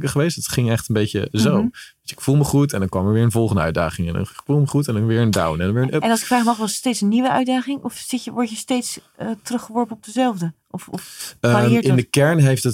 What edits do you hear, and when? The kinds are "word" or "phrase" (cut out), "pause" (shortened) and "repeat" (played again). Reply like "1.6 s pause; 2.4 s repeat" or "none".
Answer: none